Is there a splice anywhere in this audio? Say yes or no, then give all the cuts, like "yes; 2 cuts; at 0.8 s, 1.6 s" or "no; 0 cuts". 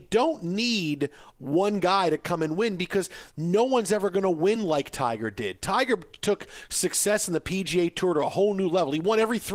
no; 0 cuts